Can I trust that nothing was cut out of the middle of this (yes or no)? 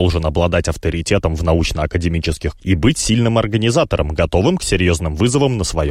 no